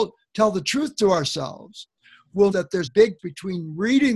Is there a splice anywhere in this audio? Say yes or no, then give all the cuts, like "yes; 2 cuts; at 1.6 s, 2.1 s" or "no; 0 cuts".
yes; 3 cuts; at 2.5 s, 2.9 s, 3.2 s